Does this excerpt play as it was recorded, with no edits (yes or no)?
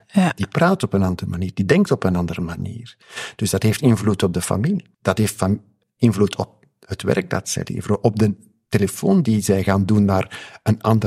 no